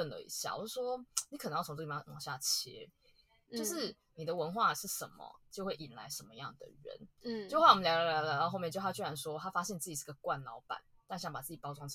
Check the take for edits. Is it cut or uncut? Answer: uncut